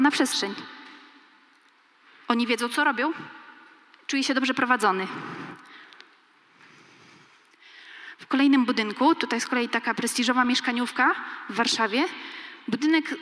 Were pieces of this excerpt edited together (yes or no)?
no